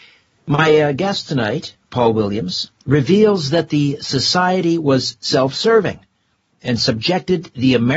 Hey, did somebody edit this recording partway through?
yes; 1 cut; at 1.8 s

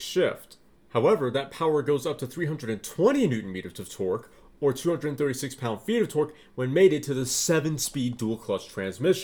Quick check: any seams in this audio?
no; 0 cuts

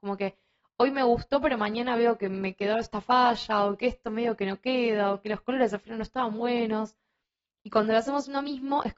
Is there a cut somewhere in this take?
no; 0 cuts

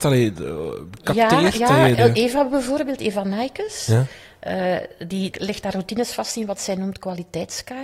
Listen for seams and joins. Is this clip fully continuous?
no; 2 cuts; at 2.0 s, 5.3 s

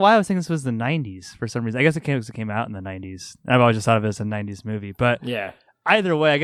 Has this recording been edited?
no; 0 cuts

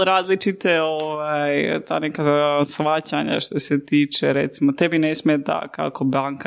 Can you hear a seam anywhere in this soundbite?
no; 0 cuts

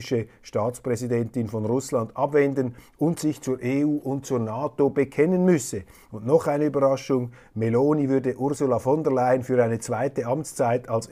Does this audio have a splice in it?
no; 0 cuts

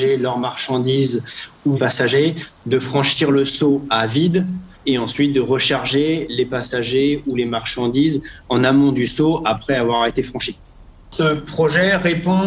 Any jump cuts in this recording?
yes; 2 cuts; at 1.7 s, 4.7 s

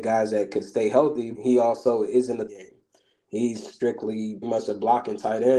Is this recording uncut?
no; 3 cuts; at 1.3 s, 2.5 s, 4.4 s

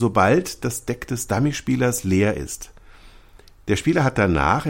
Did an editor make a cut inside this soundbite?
no; 0 cuts

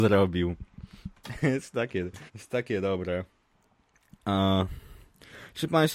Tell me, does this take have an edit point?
yes; 2 cuts; at 2.3 s, 3.5 s

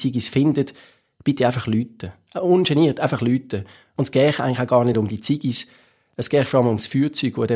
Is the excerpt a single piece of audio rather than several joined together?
yes; 0 cuts

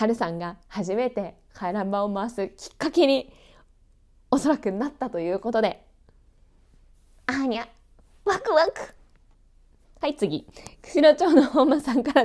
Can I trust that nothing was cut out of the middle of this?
yes; 0 cuts

